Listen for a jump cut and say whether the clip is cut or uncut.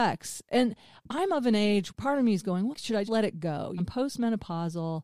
cut